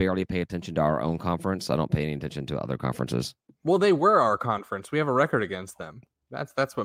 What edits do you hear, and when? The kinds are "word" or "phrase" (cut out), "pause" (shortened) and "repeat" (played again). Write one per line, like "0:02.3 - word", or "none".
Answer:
none